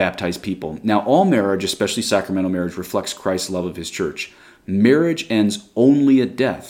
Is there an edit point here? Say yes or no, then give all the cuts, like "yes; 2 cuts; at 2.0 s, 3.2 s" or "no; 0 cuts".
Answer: no; 0 cuts